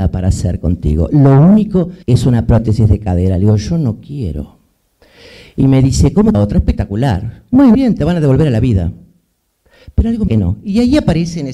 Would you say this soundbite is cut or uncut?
cut